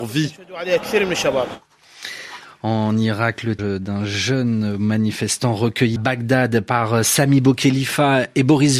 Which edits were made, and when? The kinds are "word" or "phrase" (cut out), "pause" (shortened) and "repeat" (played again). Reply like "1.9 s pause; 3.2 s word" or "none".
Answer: 3.6 s word; 6.0 s word

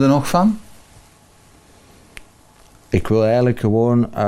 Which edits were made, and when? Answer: none

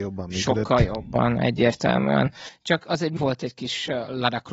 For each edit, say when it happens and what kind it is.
3.2 s word

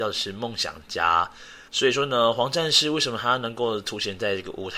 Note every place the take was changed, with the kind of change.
1.7 s pause

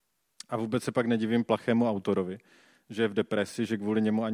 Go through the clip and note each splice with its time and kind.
none

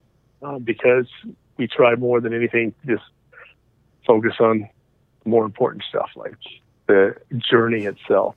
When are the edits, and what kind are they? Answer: none

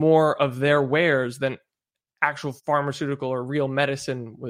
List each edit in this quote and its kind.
2.6 s pause

